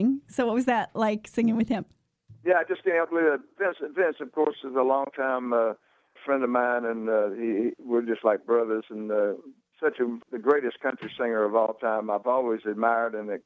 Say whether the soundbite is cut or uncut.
cut